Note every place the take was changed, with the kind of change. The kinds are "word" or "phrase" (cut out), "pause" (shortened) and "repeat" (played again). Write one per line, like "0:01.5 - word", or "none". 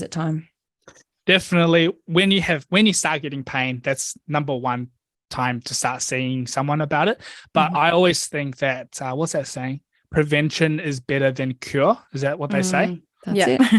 none